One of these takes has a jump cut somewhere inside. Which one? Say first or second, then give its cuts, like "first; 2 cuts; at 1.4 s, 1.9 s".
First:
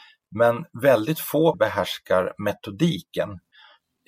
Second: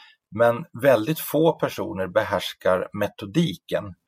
first; 1 cut; at 1.5 s